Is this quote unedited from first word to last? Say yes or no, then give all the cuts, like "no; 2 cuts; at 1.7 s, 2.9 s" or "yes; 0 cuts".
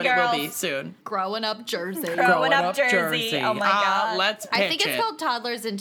no; 1 cut; at 1.0 s